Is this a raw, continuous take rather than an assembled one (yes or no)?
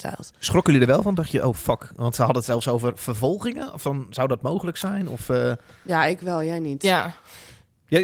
yes